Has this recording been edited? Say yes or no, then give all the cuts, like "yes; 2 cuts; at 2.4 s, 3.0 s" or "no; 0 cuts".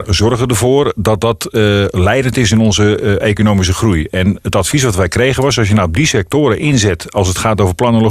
no; 0 cuts